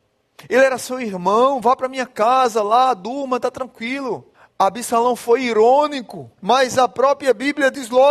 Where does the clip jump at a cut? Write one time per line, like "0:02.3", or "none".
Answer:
0:04.3
0:06.4